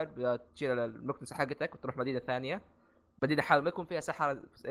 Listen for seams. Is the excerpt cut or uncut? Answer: uncut